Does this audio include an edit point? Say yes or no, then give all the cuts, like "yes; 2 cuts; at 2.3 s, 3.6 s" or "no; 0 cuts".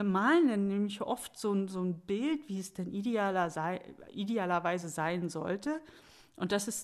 no; 0 cuts